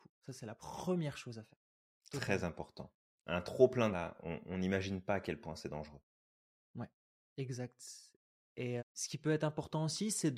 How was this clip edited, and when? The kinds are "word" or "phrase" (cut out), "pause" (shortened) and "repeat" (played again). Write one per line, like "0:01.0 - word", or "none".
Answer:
0:03.9 - word
0:08.8 - word

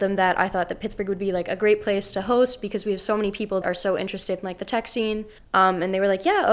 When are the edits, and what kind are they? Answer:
0:03.6 - word
0:05.4 - pause

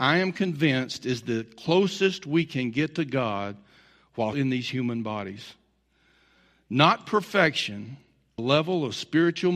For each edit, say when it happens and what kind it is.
0:04.3 - word
0:08.4 - phrase

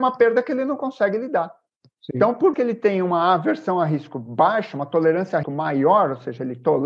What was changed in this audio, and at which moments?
0:01.7 - pause
0:02.5 - word
0:05.4 - word

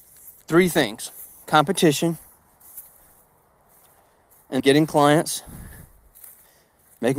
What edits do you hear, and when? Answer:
0:04.6 - word

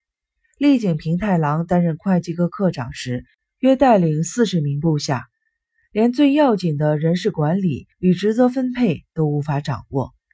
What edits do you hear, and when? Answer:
0:07.9 - pause

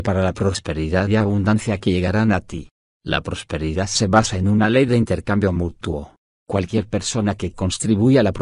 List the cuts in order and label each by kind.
none

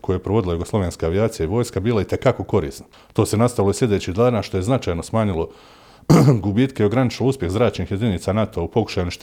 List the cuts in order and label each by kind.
0:02.9 - pause

